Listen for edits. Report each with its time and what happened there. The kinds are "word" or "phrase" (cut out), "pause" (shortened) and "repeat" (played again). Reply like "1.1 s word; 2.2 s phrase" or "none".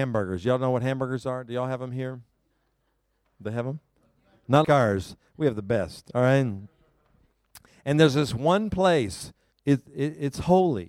4.6 s word; 9.5 s pause